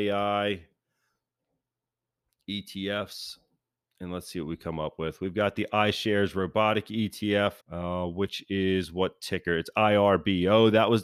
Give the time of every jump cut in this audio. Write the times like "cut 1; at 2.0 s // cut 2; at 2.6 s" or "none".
cut 1; at 7.6 s